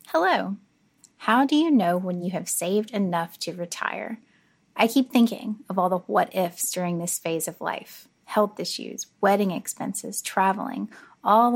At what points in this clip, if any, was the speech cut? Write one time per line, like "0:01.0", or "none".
none